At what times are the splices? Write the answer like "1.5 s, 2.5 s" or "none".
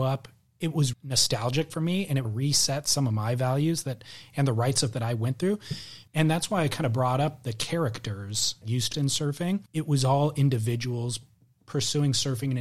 0.9 s, 2.2 s, 4.9 s, 6.1 s, 8.6 s, 8.9 s, 9.7 s